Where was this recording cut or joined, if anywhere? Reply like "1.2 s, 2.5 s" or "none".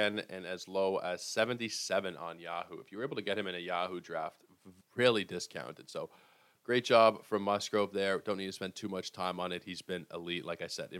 4.8 s